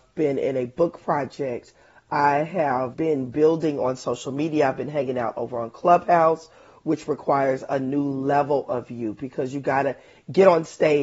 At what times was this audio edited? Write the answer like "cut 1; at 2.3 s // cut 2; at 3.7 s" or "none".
cut 1; at 2.9 s

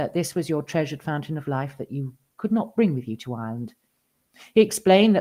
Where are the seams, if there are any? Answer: none

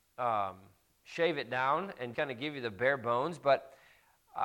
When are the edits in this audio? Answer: cut 1; at 2.1 s

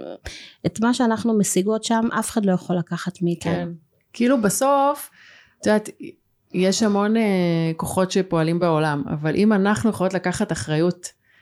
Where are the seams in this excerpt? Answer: none

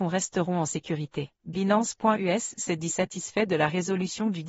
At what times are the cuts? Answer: cut 1; at 1.4 s

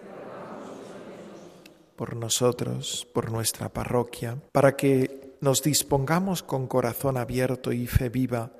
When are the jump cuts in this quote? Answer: cut 1; at 4.5 s // cut 2; at 5.4 s

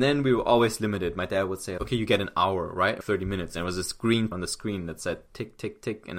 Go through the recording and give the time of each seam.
cut 1; at 1.8 s // cut 2; at 3.0 s // cut 3; at 4.3 s

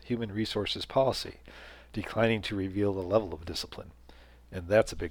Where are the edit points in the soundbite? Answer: none

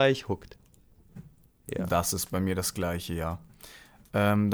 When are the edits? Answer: none

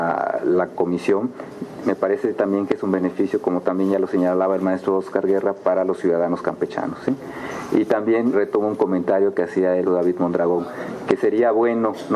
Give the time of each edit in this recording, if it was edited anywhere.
cut 1; at 1.8 s // cut 2; at 8.3 s // cut 3; at 9.9 s

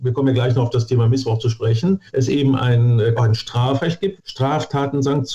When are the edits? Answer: cut 1; at 2.1 s // cut 2; at 3.2 s // cut 3; at 4.2 s

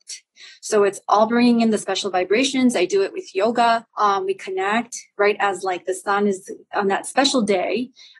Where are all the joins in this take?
cut 1; at 3.9 s

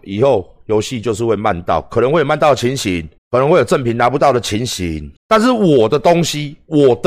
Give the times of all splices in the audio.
cut 1; at 3.2 s // cut 2; at 5.2 s

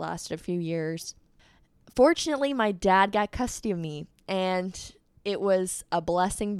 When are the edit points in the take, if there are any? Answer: none

